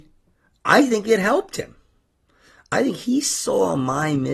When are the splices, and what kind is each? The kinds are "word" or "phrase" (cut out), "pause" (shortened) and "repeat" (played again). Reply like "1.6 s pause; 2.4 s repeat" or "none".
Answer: none